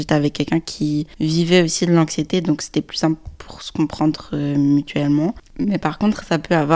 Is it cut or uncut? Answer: uncut